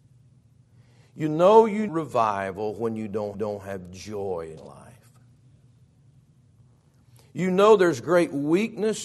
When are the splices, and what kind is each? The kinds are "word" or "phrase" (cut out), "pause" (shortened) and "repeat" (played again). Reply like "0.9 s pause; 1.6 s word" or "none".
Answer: 1.9 s word; 3.3 s repeat; 4.6 s word